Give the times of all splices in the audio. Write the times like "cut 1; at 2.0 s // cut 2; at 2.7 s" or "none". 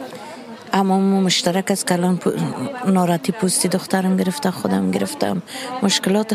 none